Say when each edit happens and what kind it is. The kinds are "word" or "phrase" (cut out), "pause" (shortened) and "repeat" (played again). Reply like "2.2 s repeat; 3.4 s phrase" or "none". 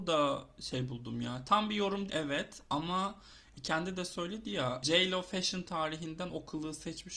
2.1 s word; 4.8 s word